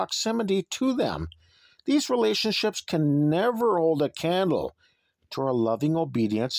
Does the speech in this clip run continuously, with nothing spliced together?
yes; 0 cuts

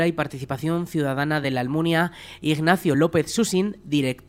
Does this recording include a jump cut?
no; 0 cuts

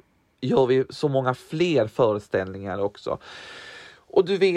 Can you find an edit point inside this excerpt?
no; 0 cuts

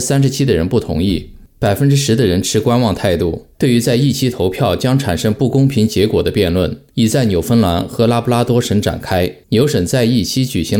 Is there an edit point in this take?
yes; 4 cuts; at 1.5 s, 3.5 s, 6.9 s, 9.4 s

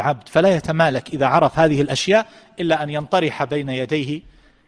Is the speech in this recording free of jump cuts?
yes; 0 cuts

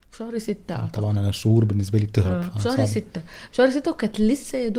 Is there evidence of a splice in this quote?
no; 0 cuts

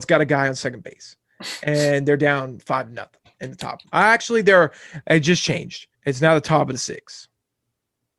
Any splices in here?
yes; 2 cuts; at 3.9 s, 5.9 s

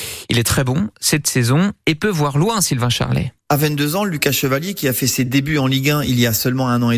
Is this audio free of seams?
yes; 0 cuts

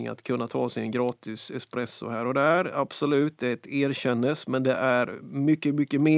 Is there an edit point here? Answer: no; 0 cuts

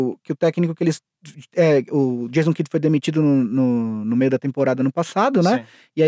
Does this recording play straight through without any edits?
yes; 0 cuts

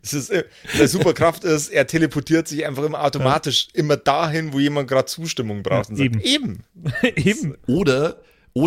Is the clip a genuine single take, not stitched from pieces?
yes; 0 cuts

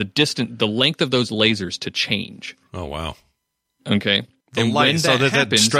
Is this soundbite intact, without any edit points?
yes; 0 cuts

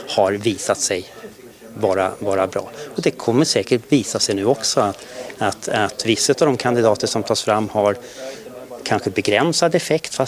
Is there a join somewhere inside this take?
no; 0 cuts

